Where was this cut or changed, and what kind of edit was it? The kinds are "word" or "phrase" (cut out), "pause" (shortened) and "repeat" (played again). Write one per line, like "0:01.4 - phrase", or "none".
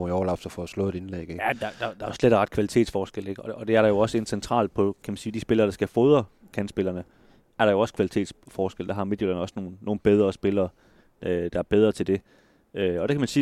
none